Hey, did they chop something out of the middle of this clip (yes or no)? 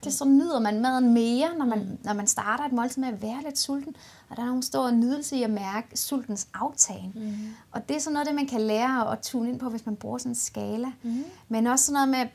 no